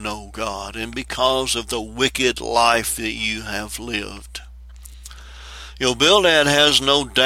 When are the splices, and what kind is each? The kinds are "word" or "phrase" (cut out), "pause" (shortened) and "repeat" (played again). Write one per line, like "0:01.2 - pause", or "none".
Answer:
none